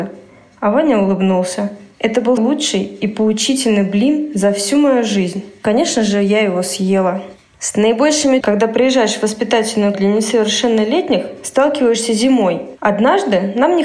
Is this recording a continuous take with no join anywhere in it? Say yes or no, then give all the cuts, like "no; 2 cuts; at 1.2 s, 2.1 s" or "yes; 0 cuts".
no; 3 cuts; at 2.4 s, 8.4 s, 9.9 s